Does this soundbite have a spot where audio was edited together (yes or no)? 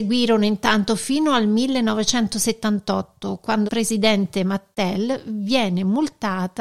yes